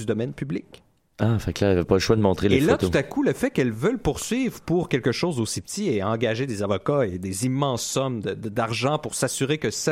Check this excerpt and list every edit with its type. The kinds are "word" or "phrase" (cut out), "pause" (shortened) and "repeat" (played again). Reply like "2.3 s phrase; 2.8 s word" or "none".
none